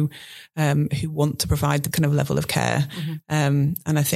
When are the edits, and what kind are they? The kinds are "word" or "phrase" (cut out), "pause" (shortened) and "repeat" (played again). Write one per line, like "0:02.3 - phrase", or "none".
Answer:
0:01.9 - word